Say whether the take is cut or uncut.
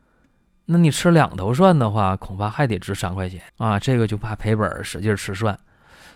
cut